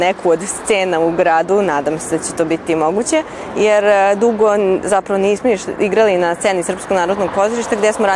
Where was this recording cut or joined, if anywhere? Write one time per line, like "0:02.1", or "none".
none